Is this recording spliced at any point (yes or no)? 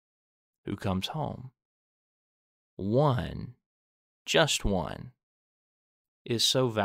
no